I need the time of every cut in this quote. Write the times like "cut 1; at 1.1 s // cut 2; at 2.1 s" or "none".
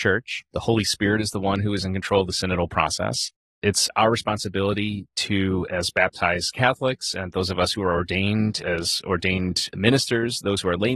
none